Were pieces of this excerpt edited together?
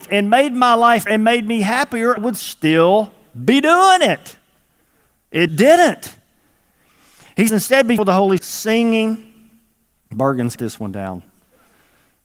yes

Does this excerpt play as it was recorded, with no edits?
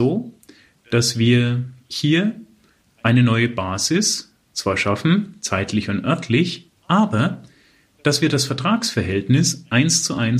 yes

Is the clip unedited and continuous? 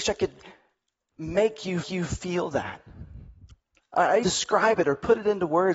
no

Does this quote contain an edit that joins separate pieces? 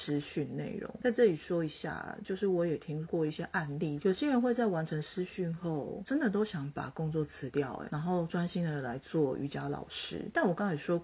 no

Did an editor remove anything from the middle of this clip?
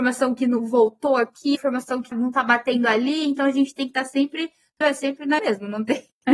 yes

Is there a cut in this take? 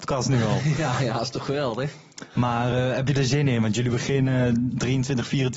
no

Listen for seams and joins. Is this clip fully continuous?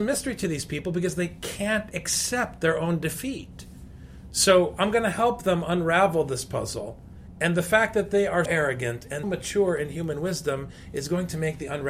no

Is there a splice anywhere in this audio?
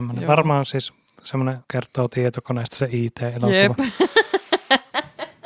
yes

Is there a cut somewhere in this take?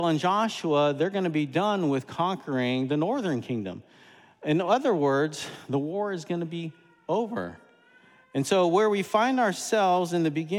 no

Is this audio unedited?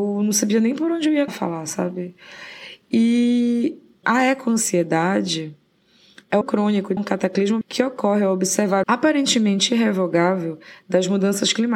no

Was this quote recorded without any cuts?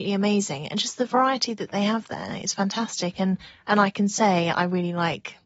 yes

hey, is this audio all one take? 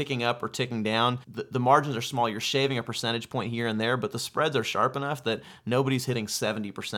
no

